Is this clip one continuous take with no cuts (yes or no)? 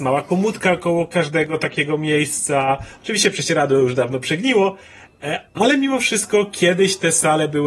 yes